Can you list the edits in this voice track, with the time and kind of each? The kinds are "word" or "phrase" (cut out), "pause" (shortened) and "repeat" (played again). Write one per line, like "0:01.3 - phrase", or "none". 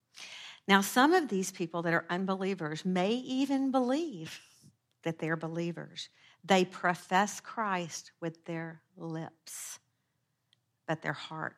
none